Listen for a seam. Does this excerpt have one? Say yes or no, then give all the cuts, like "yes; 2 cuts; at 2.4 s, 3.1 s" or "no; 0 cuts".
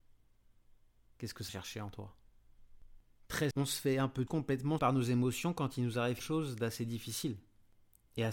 yes; 5 cuts; at 1.5 s, 3.5 s, 4.3 s, 4.8 s, 6.2 s